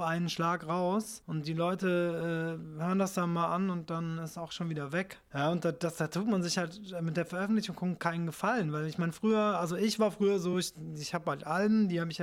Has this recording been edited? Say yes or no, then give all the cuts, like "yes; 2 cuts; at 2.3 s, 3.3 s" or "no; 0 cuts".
no; 0 cuts